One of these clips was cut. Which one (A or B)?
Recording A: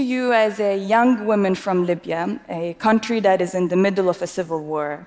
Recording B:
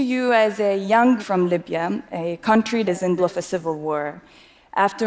B